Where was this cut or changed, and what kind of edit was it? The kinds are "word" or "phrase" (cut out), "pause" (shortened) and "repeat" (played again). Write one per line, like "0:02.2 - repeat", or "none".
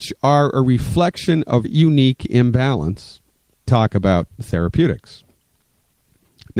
0:01.6 - word
0:03.7 - word